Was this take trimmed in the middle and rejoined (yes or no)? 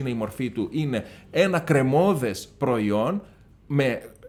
no